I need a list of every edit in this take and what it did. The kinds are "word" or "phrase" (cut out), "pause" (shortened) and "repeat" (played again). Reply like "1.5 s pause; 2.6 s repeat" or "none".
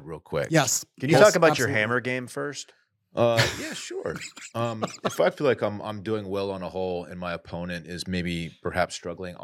none

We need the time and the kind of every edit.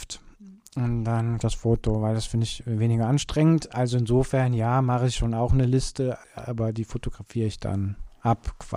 1.4 s phrase; 6.2 s pause

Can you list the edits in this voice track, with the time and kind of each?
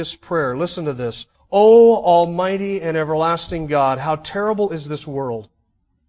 1.3 s pause

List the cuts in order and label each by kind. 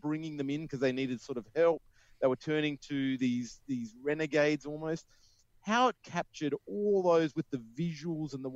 none

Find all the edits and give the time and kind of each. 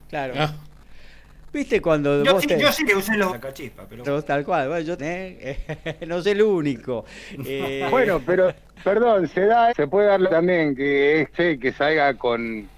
2.9 s word; 3.3 s word; 4.1 s word; 5.0 s word; 6.2 s word; 9.3 s word; 9.7 s word; 10.3 s word; 11.3 s word

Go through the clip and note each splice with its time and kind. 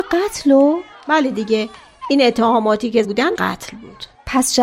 3.0 s word; 3.4 s word

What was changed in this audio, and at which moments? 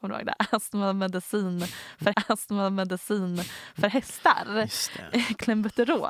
2.1 s repeat

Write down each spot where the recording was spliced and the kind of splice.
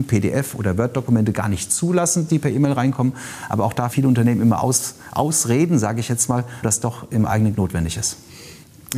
2.3 s word; 3.9 s word; 6.6 s word; 7.5 s word

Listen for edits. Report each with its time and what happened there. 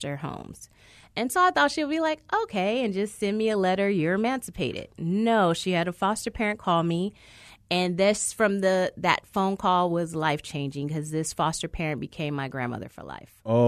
none

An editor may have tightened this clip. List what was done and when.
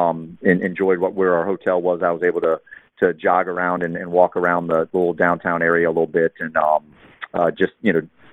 none

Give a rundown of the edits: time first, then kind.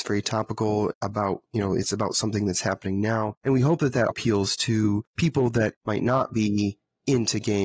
1.0 s pause; 3.4 s pause; 4.1 s word; 5.1 s pause

